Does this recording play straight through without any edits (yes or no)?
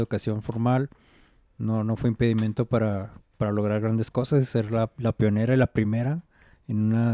yes